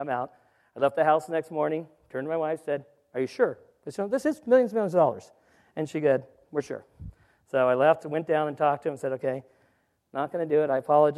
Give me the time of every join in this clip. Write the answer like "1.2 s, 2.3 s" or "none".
none